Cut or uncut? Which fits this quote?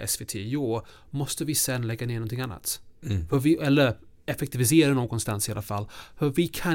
uncut